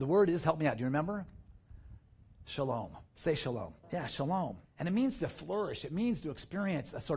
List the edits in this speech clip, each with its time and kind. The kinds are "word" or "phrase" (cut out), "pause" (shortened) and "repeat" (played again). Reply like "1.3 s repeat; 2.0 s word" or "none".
3.1 s pause; 3.8 s pause; 4.6 s pause